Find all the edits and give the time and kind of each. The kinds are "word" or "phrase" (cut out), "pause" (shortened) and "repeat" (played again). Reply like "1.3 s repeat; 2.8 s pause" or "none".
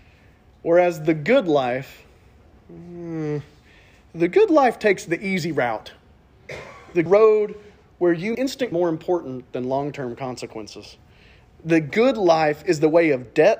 7.1 s phrase; 8.3 s word; 8.7 s word